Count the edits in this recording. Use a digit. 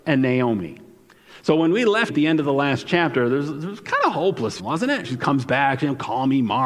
3